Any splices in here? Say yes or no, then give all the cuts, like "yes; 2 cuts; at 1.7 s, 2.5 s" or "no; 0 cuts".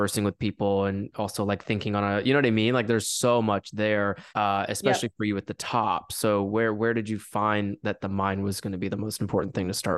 yes; 1 cut; at 4.3 s